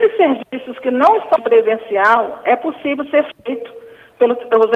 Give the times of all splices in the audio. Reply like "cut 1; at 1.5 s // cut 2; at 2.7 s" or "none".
cut 1; at 1.4 s

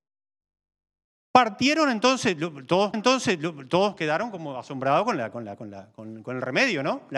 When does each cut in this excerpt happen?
cut 1; at 2.9 s

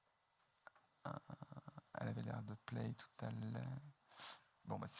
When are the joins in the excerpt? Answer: none

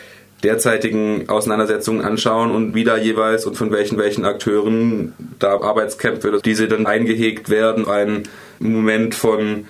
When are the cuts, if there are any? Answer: cut 1; at 2.7 s // cut 2; at 4.0 s // cut 3; at 5.6 s // cut 4; at 6.4 s // cut 5; at 6.9 s // cut 6; at 7.8 s // cut 7; at 8.6 s

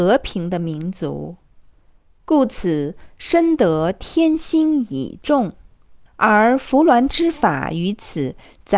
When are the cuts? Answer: cut 1; at 6.1 s

